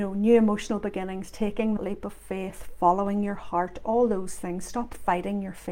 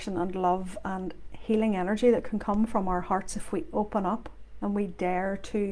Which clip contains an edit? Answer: first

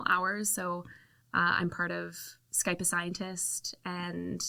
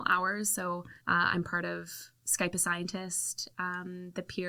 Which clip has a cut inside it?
second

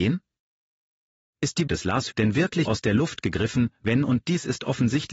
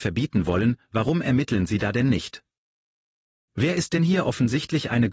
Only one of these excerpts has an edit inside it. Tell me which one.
first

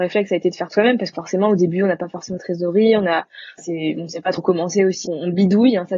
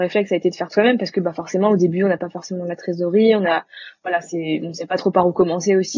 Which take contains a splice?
first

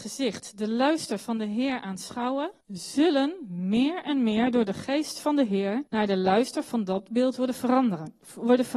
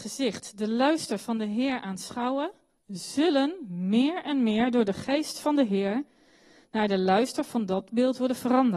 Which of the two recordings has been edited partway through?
first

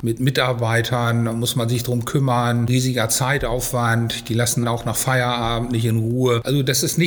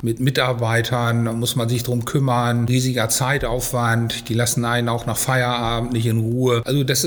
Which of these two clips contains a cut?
first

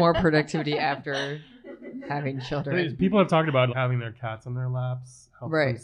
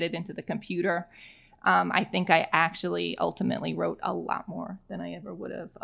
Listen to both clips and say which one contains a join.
first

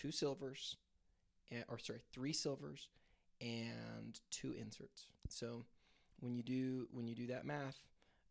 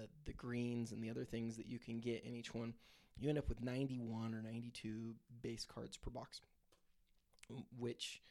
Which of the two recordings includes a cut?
first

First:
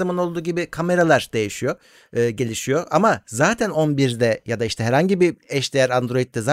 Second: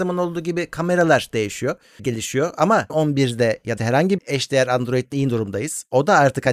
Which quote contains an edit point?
second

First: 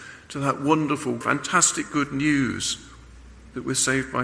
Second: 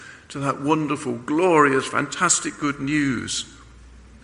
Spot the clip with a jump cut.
first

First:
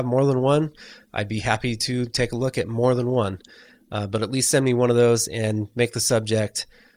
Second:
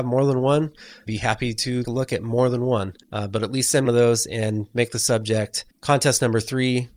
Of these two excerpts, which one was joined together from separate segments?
second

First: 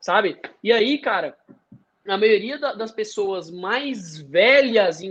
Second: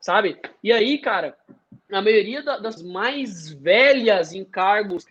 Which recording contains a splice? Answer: second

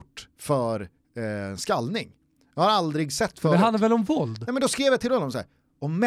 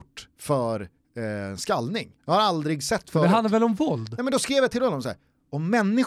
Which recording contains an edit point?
second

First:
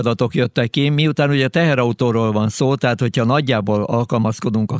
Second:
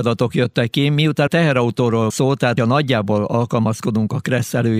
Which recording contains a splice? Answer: second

